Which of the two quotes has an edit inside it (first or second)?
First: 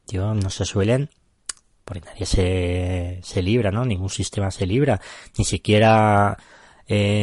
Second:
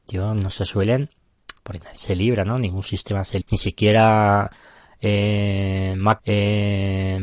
second